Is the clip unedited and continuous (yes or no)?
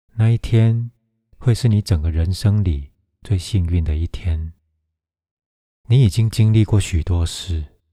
yes